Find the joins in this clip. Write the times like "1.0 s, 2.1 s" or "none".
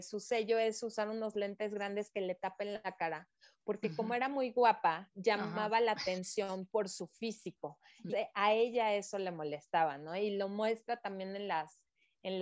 8.1 s